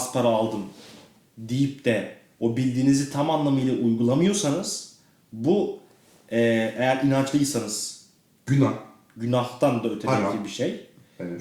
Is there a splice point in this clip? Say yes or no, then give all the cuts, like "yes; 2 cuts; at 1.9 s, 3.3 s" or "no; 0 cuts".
no; 0 cuts